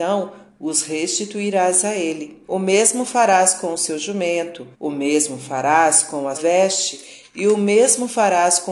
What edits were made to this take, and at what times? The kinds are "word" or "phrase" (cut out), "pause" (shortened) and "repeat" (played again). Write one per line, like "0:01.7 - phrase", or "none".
0:02.4 - pause
0:04.7 - pause
0:06.3 - word